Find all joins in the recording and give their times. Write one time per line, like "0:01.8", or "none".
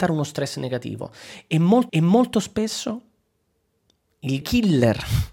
0:01.9
0:04.4